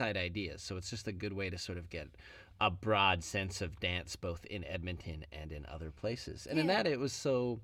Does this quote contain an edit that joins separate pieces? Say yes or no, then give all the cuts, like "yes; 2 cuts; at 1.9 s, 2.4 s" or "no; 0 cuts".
no; 0 cuts